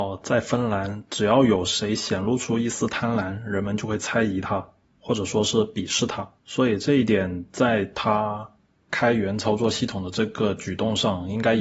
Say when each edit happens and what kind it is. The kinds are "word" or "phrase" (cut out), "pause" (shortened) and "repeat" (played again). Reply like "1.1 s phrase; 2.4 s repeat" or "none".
6.4 s pause